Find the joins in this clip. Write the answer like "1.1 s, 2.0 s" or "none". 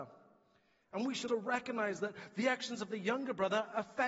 1.3 s